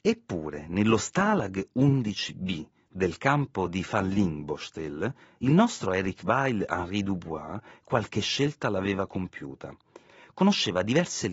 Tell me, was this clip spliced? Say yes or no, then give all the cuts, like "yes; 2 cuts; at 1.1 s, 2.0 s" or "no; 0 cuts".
no; 0 cuts